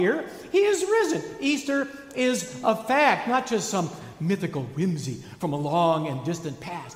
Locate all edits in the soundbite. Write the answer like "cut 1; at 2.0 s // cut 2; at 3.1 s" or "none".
none